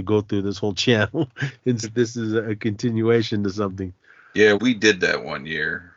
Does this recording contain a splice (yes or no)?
yes